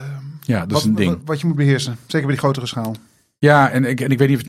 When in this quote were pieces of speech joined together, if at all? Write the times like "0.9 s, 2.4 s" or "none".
none